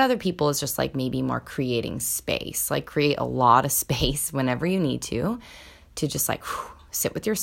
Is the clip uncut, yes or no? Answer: yes